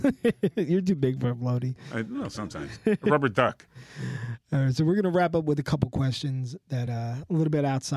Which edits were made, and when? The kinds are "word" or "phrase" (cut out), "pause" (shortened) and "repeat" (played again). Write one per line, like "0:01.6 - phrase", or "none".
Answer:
none